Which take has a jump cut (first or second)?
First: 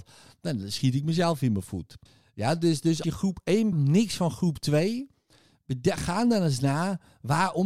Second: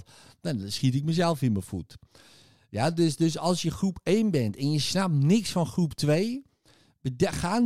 first